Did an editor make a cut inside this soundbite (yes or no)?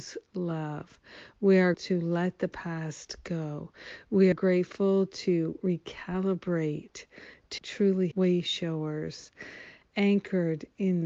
yes